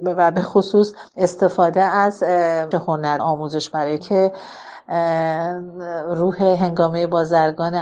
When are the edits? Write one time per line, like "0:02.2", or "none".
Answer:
0:01.1
0:02.7
0:03.2
0:04.0